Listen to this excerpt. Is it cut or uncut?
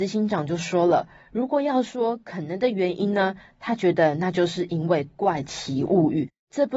uncut